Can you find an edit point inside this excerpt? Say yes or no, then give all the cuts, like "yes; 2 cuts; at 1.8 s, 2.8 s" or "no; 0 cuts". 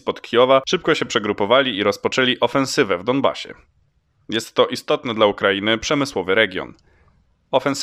no; 0 cuts